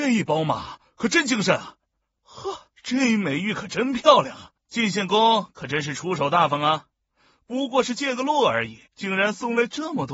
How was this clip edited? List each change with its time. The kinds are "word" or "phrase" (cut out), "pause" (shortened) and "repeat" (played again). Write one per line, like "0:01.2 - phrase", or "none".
0:02.7 - pause
0:04.6 - pause
0:08.9 - pause